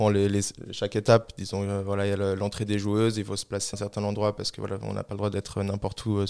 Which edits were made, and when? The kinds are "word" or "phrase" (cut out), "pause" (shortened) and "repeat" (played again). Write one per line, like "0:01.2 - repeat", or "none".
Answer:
0:03.7 - word